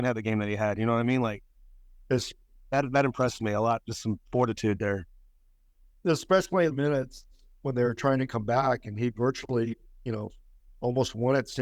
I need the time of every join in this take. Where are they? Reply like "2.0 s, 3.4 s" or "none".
6.7 s